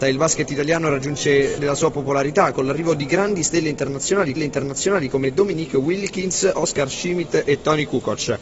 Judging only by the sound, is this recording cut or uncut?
cut